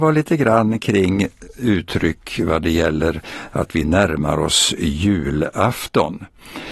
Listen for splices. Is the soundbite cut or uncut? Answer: uncut